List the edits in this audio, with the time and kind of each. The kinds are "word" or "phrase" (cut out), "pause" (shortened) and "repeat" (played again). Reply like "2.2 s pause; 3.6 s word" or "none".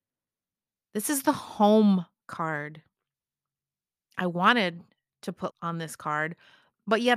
5.5 s word